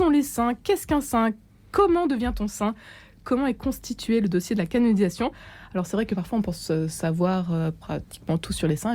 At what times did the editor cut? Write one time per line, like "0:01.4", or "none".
none